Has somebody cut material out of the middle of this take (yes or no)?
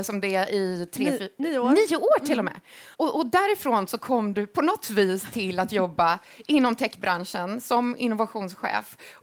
yes